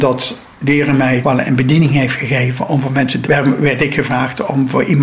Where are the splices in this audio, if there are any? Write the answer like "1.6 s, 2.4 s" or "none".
1.2 s, 3.2 s